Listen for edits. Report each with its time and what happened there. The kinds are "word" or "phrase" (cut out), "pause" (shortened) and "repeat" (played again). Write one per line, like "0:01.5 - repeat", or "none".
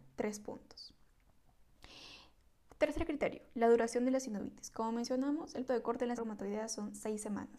0:05.7 - word
0:06.2 - word